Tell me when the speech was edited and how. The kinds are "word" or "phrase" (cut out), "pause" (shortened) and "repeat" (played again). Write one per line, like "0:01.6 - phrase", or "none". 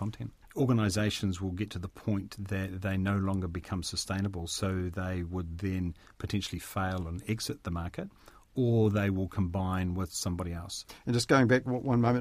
none

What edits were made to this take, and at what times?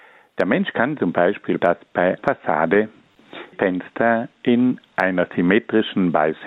0:01.6 - word
0:02.2 - word
0:03.5 - word
0:04.3 - word

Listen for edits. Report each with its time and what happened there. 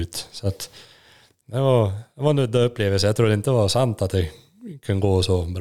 none

